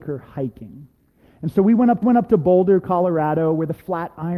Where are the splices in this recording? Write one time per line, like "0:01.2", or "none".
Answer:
0:02.0